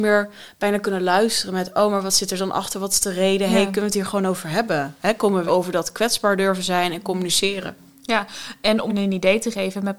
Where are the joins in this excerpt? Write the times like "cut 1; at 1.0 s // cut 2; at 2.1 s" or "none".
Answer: cut 1; at 5.5 s // cut 2; at 8.9 s